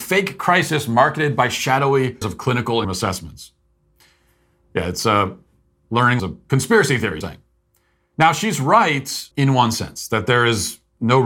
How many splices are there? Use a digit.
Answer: 5